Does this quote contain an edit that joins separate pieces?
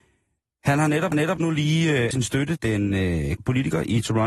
yes; 4 cuts; at 1.1 s, 2.1 s, 2.6 s, 3.4 s

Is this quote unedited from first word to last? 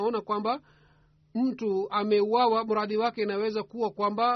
yes; 0 cuts

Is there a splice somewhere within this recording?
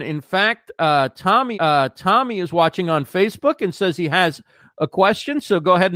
yes; 1 cut; at 1.5 s

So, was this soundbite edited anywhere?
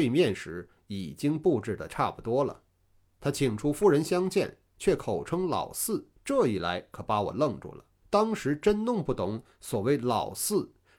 yes; 2 cuts; at 6.2 s, 8.0 s

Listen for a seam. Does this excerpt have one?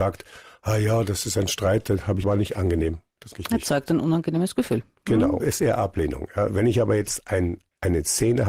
yes; 3 cuts; at 2.2 s, 3.3 s, 5.4 s

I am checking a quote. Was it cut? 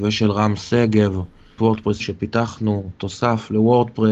yes; 2 cuts; at 1.6 s, 2.0 s

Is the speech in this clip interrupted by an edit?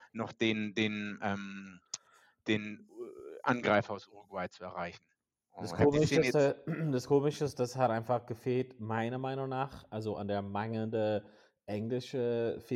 no; 0 cuts

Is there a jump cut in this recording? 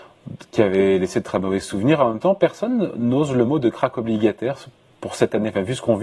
no; 0 cuts

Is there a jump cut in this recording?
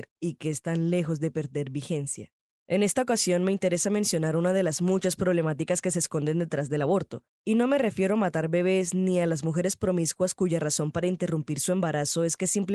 no; 0 cuts

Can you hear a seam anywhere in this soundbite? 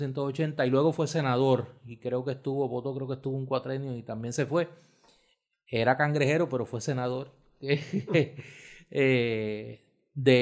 no; 0 cuts

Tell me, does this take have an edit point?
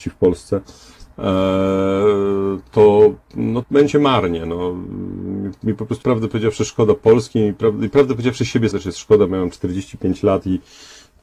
yes; 3 cuts; at 3.6 s, 6.0 s, 8.7 s

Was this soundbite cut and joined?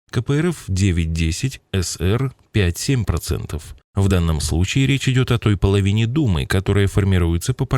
no; 0 cuts

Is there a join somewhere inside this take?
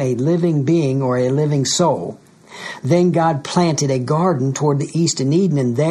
no; 0 cuts

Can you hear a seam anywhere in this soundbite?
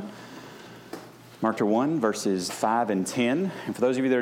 yes; 2 cuts; at 1.6 s, 2.5 s

